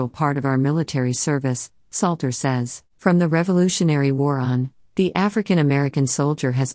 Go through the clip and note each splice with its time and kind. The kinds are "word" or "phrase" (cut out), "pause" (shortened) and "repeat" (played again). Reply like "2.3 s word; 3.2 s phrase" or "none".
2.9 s pause